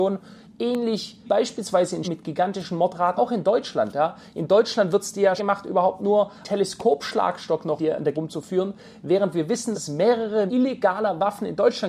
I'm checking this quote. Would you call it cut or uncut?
cut